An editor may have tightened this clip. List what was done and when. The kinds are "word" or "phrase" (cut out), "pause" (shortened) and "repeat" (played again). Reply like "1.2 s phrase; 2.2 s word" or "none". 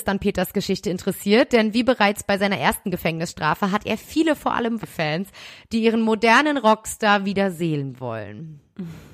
4.8 s word